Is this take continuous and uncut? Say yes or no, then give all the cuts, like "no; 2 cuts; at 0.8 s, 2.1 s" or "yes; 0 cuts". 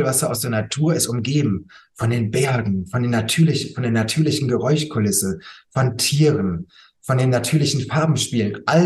yes; 0 cuts